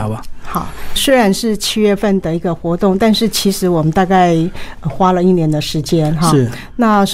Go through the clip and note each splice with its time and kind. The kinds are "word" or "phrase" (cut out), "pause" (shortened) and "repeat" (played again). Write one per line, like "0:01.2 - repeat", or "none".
0:01.0 - word

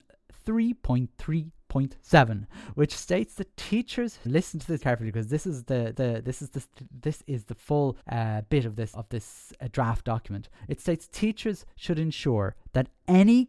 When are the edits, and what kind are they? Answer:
0:04.2 - word
0:04.8 - word
0:05.9 - repeat
0:08.0 - pause
0:08.9 - word
0:10.6 - pause

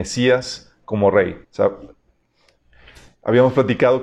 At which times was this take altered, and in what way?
0:01.4 - pause

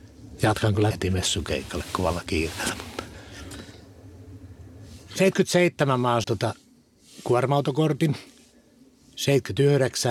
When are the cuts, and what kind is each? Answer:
0:00.9 - word
0:06.2 - word

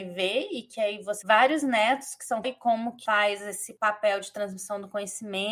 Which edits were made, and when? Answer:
0:01.2 - word
0:02.4 - phrase
0:03.1 - word

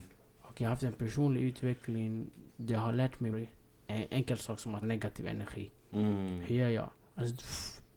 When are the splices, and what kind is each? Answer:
0:02.5 - pause
0:03.3 - phrase
0:04.8 - word

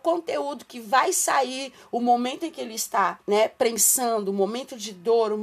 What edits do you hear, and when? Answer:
0:03.2 - pause

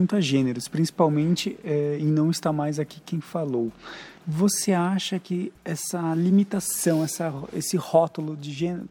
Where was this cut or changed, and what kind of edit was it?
0:04.2 - pause
0:05.6 - pause

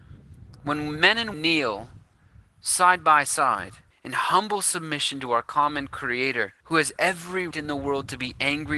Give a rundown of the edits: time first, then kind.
0:01.3 - word
0:03.9 - pause
0:06.6 - pause
0:07.5 - word

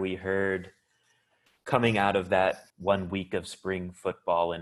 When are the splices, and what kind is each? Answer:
0:02.7 - pause

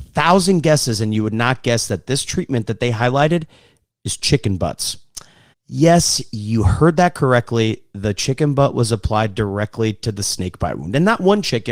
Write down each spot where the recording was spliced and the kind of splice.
0:05.5 - pause

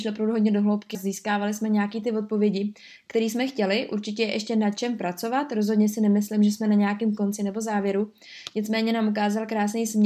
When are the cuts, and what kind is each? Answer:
0:00.9 - word

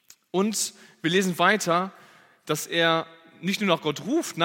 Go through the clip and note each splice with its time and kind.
none

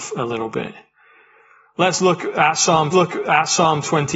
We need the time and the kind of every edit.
0:02.9 - repeat

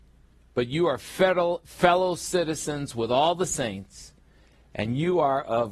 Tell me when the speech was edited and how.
none

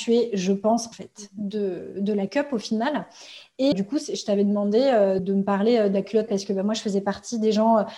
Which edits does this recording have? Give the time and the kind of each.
0:00.9 - phrase
0:03.7 - word
0:05.2 - word
0:06.3 - word

